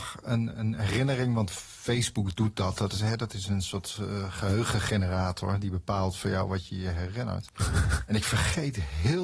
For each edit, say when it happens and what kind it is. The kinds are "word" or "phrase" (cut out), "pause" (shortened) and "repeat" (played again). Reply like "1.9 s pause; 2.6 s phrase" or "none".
none